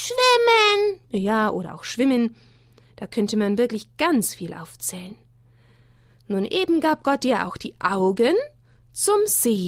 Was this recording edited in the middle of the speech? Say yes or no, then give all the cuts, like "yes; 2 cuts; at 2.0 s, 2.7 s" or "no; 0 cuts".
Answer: no; 0 cuts